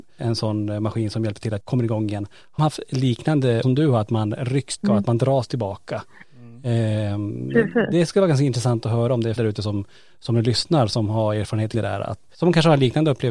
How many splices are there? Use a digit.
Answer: 7